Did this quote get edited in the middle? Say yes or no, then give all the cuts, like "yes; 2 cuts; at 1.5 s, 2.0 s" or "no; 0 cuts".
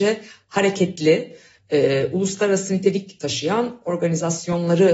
no; 0 cuts